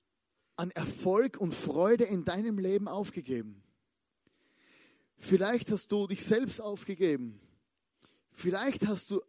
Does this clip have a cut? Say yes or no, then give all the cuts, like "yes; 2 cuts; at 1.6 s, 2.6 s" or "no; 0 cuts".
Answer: no; 0 cuts